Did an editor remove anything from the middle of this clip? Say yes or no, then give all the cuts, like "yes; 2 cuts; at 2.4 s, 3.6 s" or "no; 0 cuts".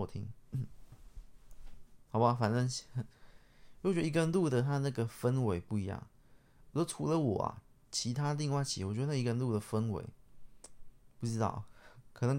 no; 0 cuts